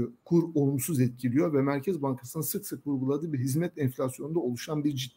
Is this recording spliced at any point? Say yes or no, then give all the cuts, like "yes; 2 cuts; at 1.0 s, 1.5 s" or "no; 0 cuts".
no; 0 cuts